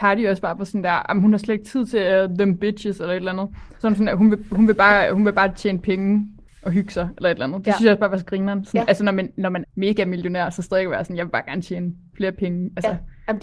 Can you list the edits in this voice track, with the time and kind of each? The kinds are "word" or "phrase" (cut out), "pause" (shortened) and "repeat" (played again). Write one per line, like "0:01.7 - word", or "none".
0:06.5 - pause
0:09.6 - word